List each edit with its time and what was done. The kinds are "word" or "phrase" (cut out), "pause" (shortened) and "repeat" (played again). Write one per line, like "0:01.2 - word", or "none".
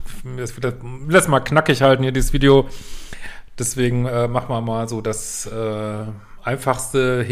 none